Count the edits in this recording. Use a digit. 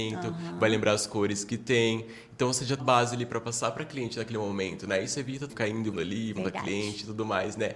4